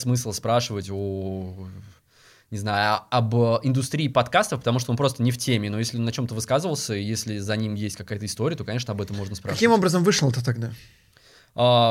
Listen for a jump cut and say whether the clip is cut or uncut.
uncut